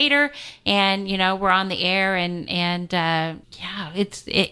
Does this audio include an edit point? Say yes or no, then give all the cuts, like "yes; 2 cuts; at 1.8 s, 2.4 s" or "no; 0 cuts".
yes; 1 cut; at 3.4 s